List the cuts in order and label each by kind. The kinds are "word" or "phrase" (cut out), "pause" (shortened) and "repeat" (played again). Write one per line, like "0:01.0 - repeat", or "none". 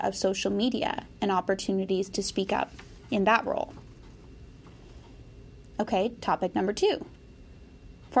none